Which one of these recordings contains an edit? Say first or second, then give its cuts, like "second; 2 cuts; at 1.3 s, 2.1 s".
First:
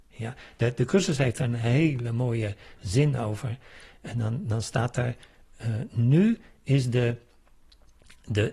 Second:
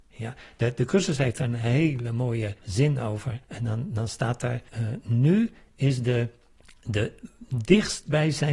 second; 4 cuts; at 2.6 s, 3.4 s, 4.7 s, 6.6 s